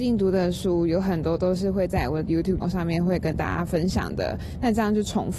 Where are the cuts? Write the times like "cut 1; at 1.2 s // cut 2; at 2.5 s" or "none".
cut 1; at 2.6 s